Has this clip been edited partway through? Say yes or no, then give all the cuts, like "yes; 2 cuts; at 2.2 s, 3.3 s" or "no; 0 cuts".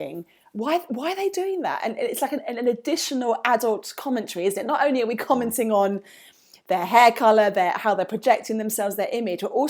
no; 0 cuts